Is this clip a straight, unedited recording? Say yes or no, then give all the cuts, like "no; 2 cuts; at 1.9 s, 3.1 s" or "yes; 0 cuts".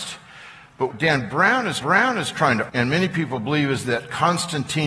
no; 3 cuts; at 0.9 s, 1.8 s, 2.7 s